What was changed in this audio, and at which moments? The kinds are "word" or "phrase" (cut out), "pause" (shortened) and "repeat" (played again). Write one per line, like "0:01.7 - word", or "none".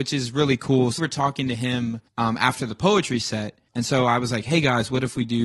0:01.0 - phrase
0:02.1 - pause
0:03.7 - pause